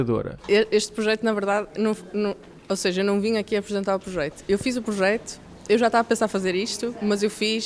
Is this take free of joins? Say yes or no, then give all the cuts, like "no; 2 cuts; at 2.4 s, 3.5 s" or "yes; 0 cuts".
yes; 0 cuts